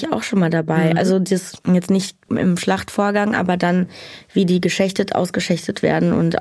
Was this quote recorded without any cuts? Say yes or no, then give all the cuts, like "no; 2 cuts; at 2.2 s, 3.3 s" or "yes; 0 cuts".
no; 1 cut; at 1.6 s